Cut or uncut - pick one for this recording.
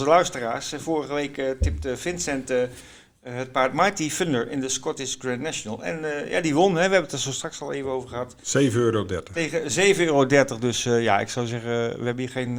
uncut